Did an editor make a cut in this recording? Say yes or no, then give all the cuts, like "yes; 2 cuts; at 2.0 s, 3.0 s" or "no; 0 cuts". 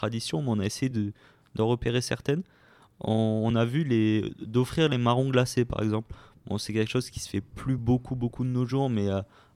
no; 0 cuts